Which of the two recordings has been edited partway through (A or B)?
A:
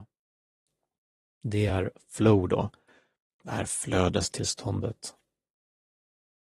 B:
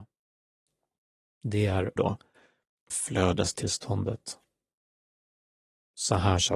B